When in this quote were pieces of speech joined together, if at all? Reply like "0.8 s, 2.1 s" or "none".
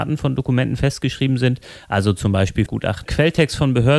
2.7 s, 3.0 s